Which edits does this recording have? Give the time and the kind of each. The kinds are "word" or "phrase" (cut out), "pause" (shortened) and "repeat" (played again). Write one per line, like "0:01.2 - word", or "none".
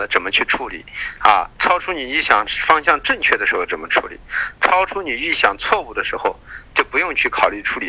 0:01.5 - pause